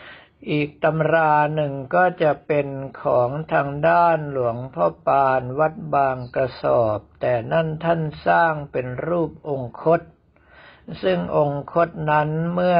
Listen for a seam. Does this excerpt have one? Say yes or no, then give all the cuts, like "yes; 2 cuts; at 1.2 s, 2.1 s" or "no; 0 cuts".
no; 0 cuts